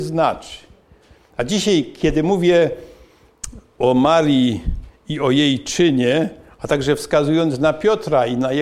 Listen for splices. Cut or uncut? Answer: uncut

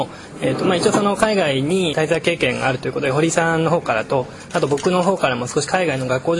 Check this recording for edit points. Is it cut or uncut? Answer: cut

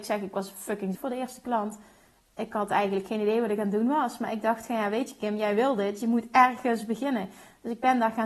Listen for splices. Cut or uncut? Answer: cut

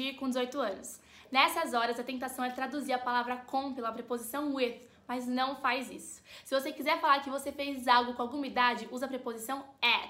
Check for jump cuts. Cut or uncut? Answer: uncut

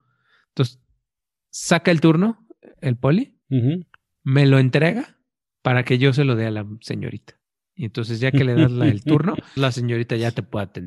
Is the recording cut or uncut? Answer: cut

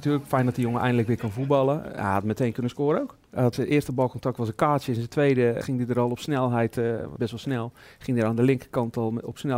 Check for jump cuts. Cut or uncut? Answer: cut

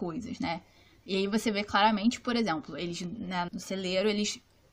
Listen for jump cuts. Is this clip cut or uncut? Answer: cut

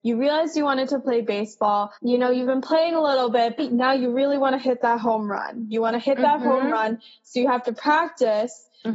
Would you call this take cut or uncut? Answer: cut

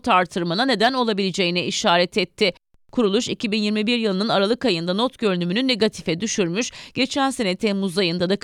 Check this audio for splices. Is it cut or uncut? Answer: uncut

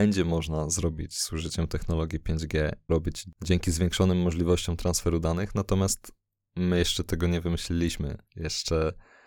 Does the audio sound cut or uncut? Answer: cut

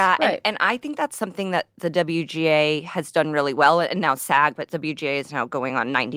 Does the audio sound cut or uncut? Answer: uncut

